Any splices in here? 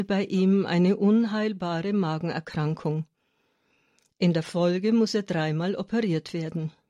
no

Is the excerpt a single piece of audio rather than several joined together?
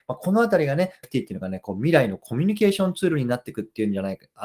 no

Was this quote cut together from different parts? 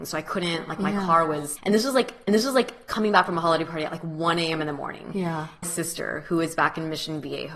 yes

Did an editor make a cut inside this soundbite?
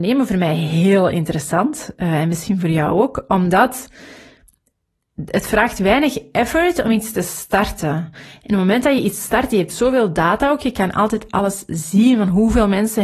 no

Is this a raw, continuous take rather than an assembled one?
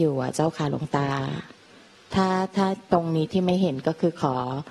yes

